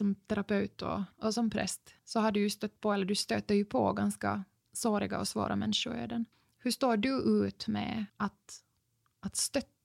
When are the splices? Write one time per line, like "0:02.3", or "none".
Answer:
0:01.1
0:02.0
0:06.3
0:08.1